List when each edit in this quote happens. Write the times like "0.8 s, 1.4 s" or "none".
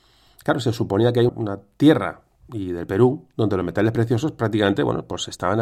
1.3 s, 2.5 s